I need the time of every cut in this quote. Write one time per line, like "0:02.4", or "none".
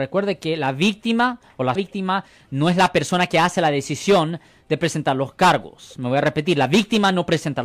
0:01.8